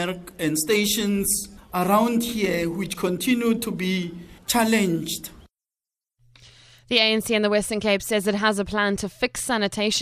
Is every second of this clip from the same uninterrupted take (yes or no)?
yes